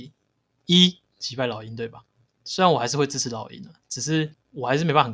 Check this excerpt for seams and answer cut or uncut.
cut